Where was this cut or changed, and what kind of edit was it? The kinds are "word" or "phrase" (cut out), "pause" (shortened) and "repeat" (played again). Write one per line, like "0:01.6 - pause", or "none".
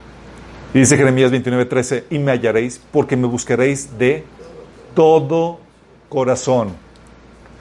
0:02.1 - phrase